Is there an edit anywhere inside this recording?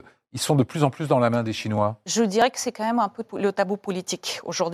yes; 1 cut; at 3.3 s

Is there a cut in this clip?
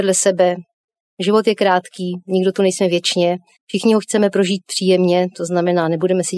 yes; 1 cut; at 3.6 s

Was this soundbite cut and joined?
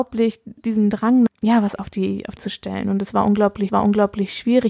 yes; 4 cuts; at 1.3 s, 1.8 s, 2.4 s, 3.7 s

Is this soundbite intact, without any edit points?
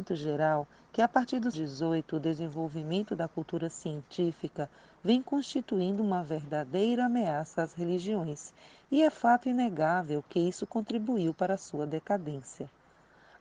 no; 1 cut; at 1.5 s

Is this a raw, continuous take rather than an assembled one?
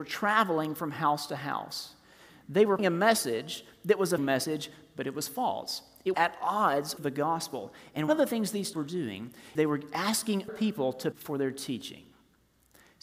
no; 9 cuts; at 2.8 s, 4.2 s, 6.1 s, 7.0 s, 8.1 s, 8.7 s, 9.6 s, 10.5 s, 11.1 s

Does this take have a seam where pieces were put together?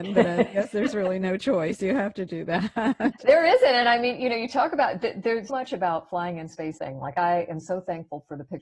yes; 2 cuts; at 5.5 s, 6.8 s

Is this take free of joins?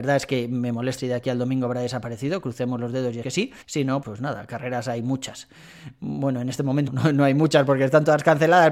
no; 5 cuts; at 1.0 s, 3.2 s, 3.6 s, 4.0 s, 6.9 s

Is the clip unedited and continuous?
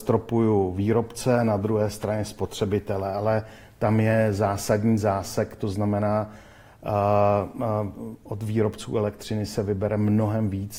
yes; 0 cuts

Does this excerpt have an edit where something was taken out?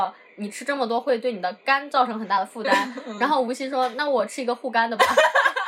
no; 0 cuts

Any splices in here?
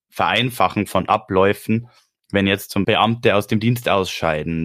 yes; 1 cut; at 2.8 s

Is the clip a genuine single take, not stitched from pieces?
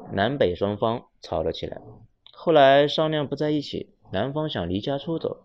yes; 0 cuts

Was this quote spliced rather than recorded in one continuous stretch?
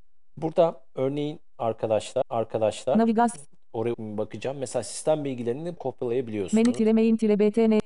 yes; 3 cuts; at 2.2 s, 3.9 s, 5.8 s

